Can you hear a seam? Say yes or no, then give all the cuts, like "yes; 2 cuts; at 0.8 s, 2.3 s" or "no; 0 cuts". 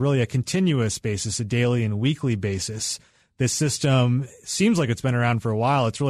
no; 0 cuts